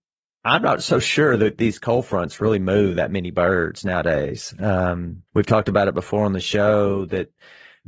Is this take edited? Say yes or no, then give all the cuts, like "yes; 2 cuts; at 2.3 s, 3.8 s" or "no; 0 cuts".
yes; 1 cut; at 5.3 s